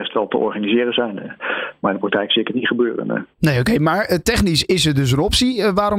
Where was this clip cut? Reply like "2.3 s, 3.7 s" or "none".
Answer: 3.3 s